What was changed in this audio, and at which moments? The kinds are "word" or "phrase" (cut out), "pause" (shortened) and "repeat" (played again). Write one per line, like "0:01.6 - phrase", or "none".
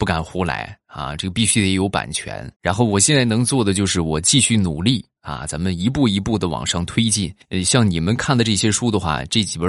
0:02.6 - pause
0:07.4 - pause